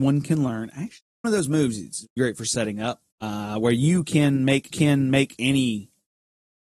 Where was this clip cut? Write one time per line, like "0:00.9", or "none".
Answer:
0:01.2
0:02.2
0:03.1
0:04.7